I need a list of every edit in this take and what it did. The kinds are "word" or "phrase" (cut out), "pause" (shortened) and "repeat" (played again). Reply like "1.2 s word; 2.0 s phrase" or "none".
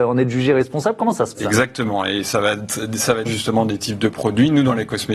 1.4 s word; 3.3 s word